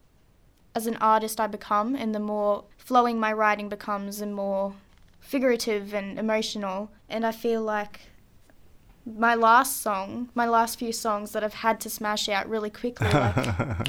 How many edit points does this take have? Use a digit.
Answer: 3